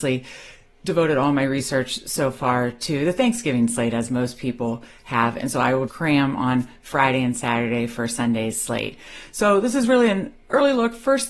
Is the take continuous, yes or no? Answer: no